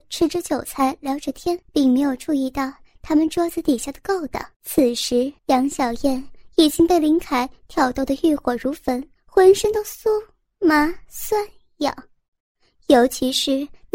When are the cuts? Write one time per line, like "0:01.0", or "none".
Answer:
0:01.6
0:04.5
0:05.4
0:09.1